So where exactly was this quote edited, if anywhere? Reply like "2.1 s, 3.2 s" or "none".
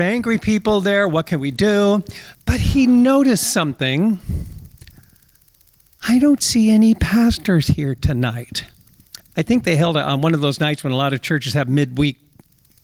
none

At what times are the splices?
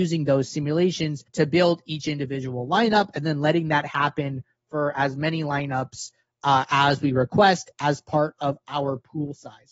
1.3 s

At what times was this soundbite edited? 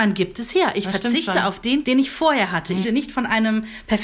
1.8 s, 2.8 s

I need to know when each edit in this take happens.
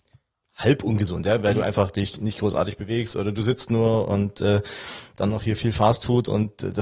none

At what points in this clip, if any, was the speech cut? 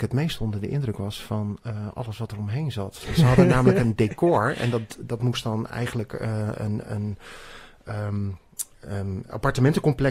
none

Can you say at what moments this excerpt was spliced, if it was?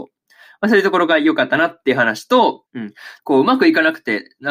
2.7 s, 3.2 s

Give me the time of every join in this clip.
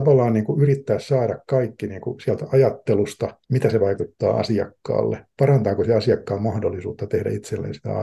3.4 s

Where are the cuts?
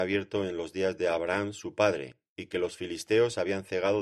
none

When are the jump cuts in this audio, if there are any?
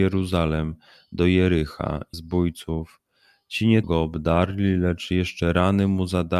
2.1 s, 3.8 s

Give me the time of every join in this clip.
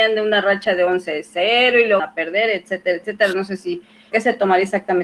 2.0 s, 4.1 s

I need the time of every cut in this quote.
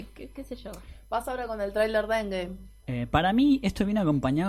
2.8 s

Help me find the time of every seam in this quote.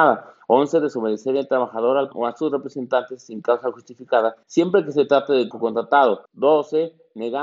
2.1 s, 4.4 s, 5.5 s, 6.3 s

